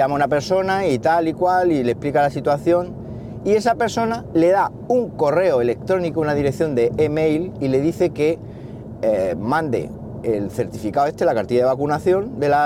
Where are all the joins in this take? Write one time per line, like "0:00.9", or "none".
none

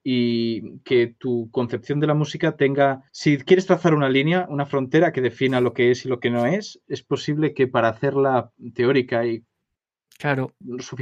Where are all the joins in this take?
0:03.1

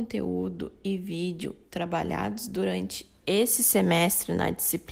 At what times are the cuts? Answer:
none

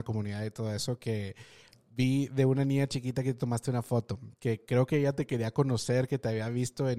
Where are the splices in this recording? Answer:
none

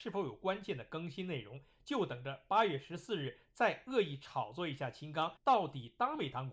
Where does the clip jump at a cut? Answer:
0:05.4

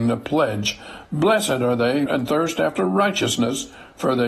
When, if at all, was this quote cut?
0:02.1

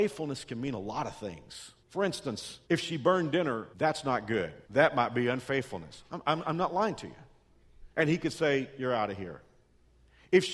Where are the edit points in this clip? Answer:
0:01.8
0:02.6
0:03.7
0:04.6
0:07.9

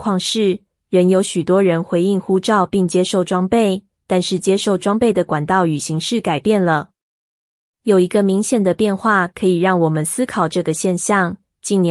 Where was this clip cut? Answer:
none

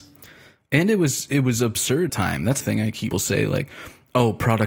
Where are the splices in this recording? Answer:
0:02.1
0:02.6
0:03.1

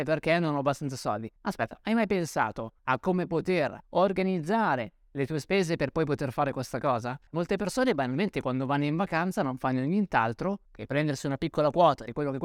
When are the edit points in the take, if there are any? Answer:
0:01.4
0:02.8
0:03.8
0:07.3
0:10.7

